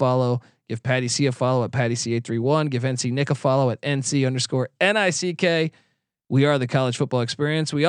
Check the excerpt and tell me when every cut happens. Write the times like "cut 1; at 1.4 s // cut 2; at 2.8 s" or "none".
none